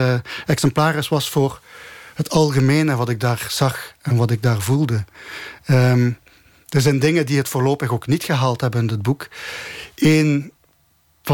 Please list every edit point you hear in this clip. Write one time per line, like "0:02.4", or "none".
none